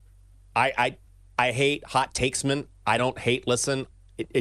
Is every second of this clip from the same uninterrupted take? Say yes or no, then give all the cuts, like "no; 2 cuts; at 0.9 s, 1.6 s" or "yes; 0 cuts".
yes; 0 cuts